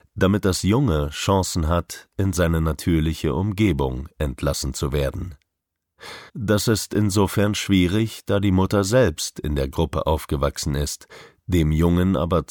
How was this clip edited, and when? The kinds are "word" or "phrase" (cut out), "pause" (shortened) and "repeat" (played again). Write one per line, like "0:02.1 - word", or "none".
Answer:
0:06.3 - pause